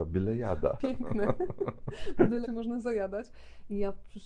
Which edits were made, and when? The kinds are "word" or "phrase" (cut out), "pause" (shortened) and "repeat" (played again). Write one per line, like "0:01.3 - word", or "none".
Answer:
0:02.4 - word